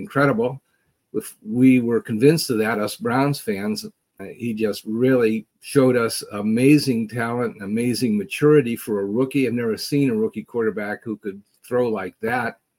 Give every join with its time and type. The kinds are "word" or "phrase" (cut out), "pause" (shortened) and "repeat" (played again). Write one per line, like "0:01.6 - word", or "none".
0:04.2 - word
0:05.5 - pause